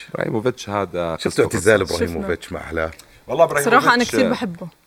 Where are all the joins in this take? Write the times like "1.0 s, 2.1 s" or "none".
none